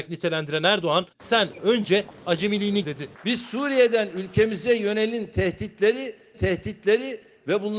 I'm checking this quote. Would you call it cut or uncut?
cut